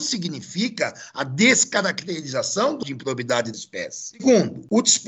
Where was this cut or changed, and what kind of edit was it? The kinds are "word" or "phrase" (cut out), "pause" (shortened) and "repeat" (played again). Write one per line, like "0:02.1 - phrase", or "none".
0:02.8 - word
0:03.5 - word